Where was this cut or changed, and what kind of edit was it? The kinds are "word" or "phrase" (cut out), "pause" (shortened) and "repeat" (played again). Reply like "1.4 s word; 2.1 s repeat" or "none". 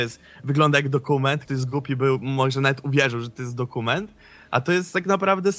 1.5 s word